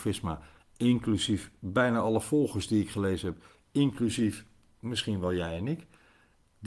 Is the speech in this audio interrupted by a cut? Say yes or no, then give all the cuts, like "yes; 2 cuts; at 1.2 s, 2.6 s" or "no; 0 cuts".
no; 0 cuts